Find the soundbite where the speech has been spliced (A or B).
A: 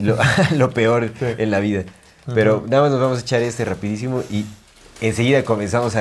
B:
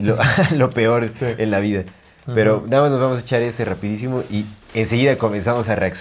B